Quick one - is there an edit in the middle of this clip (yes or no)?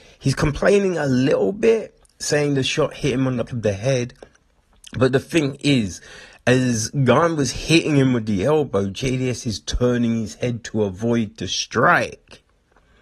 yes